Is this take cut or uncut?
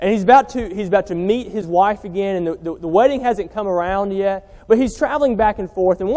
uncut